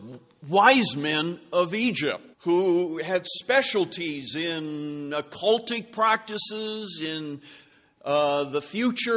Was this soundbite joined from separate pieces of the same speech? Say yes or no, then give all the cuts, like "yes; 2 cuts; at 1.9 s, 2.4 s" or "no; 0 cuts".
yes; 1 cut; at 2.3 s